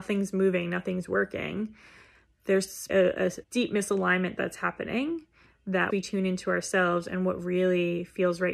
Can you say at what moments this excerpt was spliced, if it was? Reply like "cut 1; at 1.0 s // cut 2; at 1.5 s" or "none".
cut 1; at 2.9 s // cut 2; at 3.4 s // cut 3; at 5.9 s

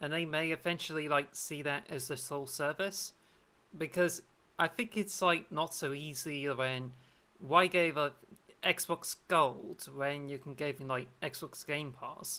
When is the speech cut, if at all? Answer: cut 1; at 10.8 s

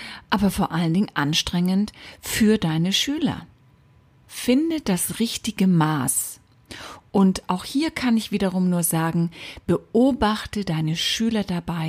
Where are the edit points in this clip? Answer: none

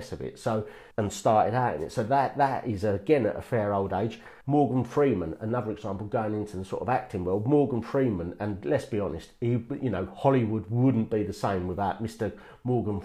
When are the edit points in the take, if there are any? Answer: cut 1; at 0.9 s // cut 2; at 4.4 s

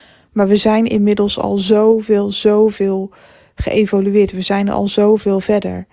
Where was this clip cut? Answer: none

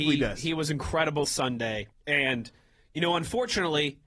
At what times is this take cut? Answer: cut 1; at 1.2 s // cut 2; at 1.9 s

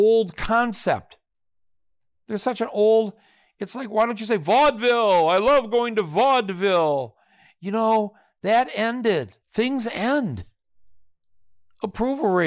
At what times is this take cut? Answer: cut 1; at 9.4 s

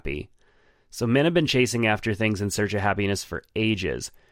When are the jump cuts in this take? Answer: none

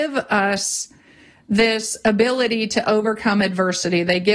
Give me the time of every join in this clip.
none

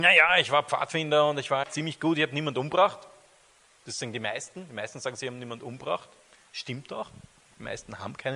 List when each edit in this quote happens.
cut 1; at 1.6 s

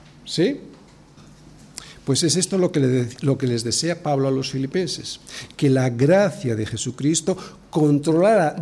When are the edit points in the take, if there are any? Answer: none

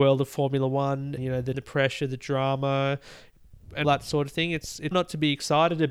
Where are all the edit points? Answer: cut 1; at 1.2 s // cut 2; at 1.5 s // cut 3; at 3.8 s // cut 4; at 4.9 s

